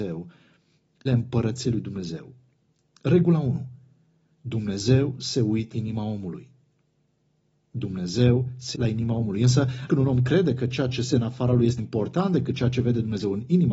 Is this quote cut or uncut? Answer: cut